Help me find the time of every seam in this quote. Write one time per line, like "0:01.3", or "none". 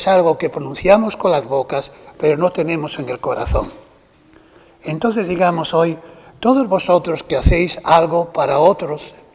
none